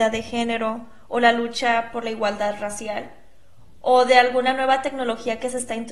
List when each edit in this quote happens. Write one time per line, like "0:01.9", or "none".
none